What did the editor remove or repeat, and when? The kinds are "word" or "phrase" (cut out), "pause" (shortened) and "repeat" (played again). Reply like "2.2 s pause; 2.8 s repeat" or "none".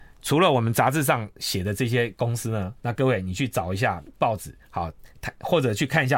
2.8 s pause; 4.6 s pause